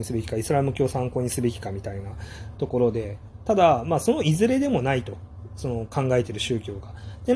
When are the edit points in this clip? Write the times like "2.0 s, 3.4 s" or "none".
none